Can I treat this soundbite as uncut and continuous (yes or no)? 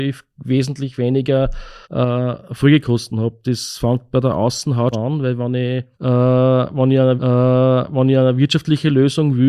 no